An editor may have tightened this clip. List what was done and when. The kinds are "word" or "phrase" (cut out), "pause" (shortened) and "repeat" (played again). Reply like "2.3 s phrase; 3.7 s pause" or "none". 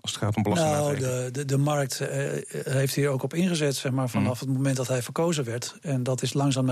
none